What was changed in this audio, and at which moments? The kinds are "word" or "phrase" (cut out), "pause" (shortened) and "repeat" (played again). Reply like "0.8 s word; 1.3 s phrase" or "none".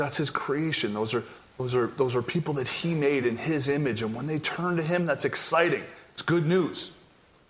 none